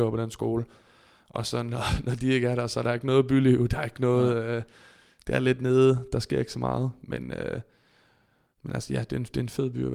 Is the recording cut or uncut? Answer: uncut